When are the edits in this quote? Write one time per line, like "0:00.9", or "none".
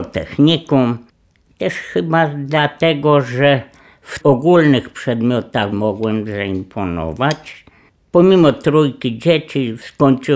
0:04.2
0:05.7